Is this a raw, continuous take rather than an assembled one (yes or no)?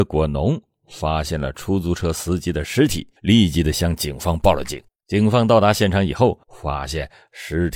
no